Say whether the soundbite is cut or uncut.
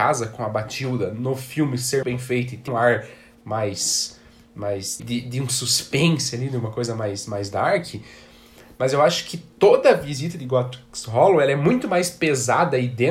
cut